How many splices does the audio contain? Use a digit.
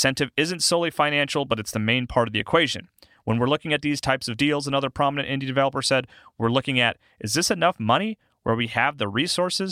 0